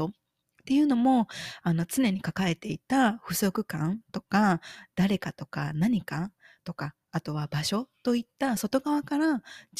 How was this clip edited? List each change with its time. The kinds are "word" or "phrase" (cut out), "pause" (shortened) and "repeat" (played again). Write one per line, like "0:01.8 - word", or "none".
none